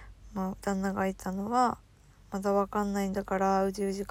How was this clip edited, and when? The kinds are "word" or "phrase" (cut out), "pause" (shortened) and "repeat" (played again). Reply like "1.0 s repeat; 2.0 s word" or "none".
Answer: none